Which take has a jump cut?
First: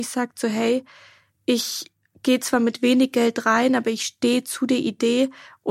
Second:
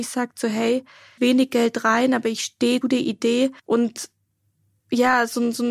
second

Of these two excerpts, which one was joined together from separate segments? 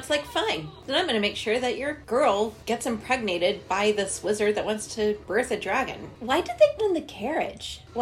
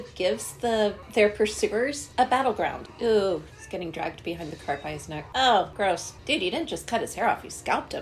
first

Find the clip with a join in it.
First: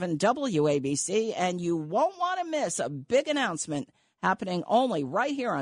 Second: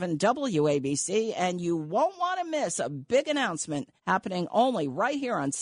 second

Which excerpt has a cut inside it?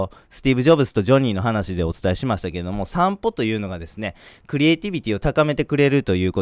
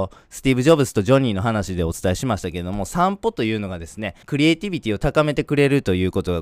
second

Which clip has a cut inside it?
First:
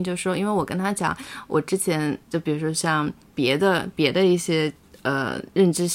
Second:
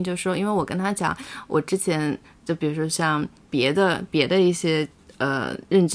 first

